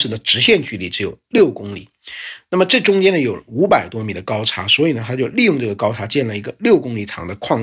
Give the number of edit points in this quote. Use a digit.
0